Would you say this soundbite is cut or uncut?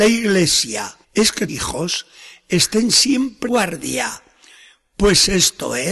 cut